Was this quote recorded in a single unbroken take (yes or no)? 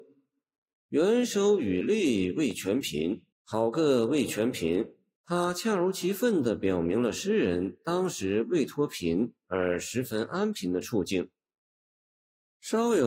no